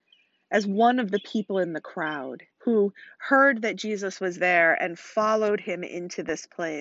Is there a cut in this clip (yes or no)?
yes